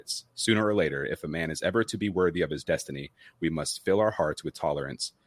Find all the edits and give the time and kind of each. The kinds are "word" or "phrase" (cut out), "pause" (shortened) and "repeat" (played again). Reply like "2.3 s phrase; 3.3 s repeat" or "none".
none